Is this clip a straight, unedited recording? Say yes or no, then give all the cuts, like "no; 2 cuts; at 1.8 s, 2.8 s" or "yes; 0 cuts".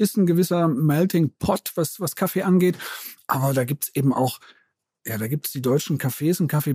yes; 0 cuts